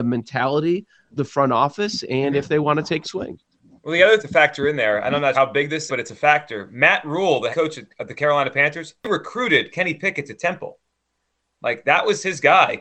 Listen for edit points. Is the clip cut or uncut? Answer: cut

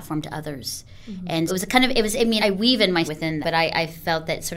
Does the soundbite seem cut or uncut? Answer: cut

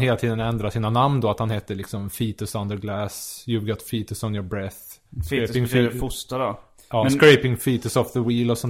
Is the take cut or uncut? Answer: uncut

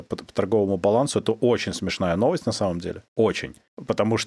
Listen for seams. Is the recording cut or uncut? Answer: uncut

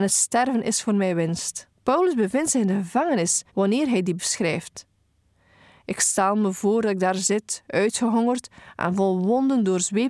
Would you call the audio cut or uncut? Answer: cut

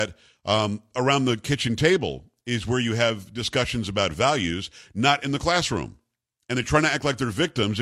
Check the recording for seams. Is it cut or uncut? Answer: uncut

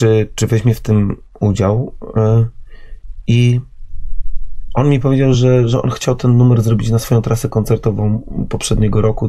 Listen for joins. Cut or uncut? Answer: uncut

